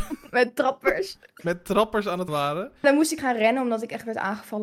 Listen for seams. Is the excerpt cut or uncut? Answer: cut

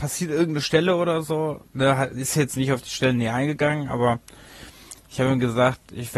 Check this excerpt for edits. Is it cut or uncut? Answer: uncut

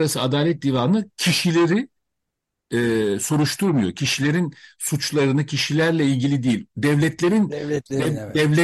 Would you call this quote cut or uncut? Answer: uncut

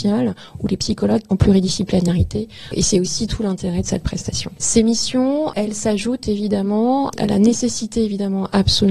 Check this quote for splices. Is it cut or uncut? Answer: cut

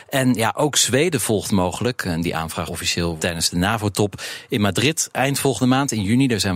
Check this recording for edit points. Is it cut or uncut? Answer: cut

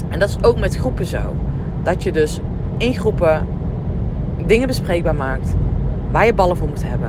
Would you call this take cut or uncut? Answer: uncut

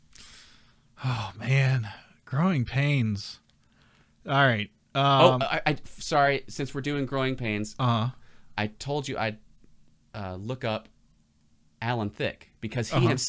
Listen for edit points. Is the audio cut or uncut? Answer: uncut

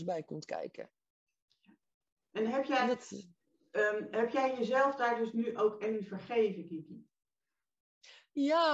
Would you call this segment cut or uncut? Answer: uncut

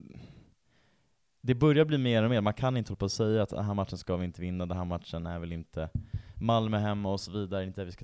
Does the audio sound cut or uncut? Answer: uncut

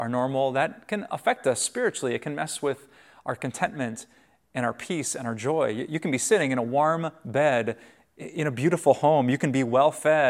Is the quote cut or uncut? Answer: uncut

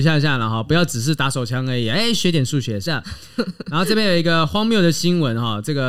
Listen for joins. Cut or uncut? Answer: cut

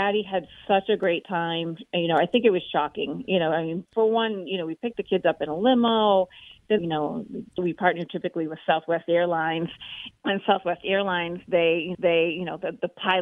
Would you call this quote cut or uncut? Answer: cut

